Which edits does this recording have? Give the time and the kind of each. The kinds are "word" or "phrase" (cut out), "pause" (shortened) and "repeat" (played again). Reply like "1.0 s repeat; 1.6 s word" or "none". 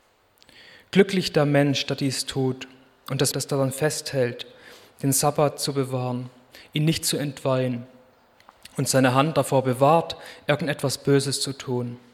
3.3 s word